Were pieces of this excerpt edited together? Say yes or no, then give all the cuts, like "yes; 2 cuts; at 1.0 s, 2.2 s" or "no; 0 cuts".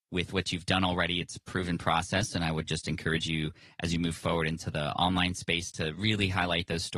no; 0 cuts